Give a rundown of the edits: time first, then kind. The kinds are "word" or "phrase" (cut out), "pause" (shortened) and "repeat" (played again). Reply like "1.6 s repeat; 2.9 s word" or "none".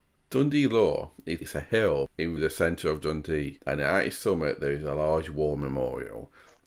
1.4 s word; 2.4 s word